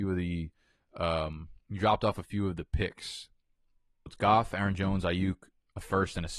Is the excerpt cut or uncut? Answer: cut